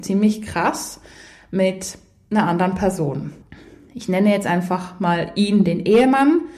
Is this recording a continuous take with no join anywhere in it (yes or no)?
yes